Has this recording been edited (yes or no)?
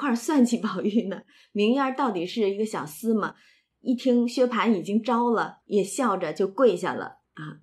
yes